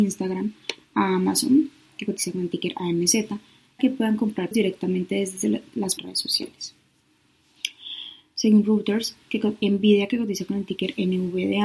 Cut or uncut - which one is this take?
cut